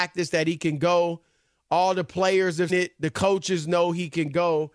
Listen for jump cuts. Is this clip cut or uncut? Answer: cut